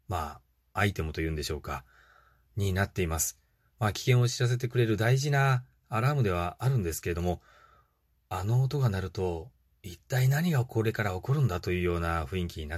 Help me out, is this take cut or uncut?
uncut